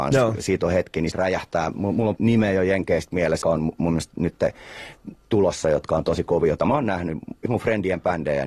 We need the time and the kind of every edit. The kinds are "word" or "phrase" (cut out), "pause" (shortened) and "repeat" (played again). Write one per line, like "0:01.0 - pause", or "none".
0:01.1 - word
0:02.2 - word
0:03.4 - word
0:07.5 - word